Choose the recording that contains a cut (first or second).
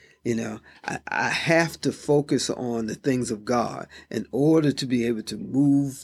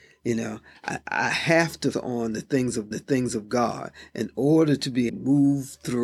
second